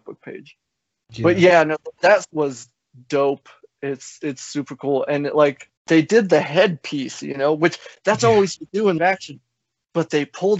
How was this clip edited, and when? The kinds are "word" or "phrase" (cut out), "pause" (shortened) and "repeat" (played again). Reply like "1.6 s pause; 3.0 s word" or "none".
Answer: 2.3 s word; 5.8 s pause; 8.6 s word; 9.0 s word